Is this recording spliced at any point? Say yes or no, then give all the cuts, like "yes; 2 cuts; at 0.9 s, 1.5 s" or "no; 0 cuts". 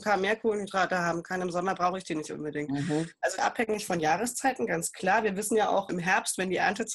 yes; 2 cuts; at 3.4 s, 5.9 s